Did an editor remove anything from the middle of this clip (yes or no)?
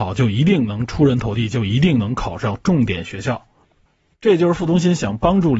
no